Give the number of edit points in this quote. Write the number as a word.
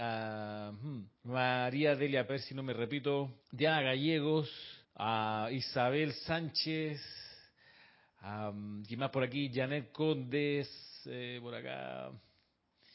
four